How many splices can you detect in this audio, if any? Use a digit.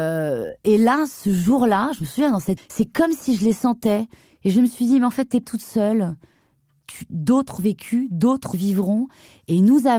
4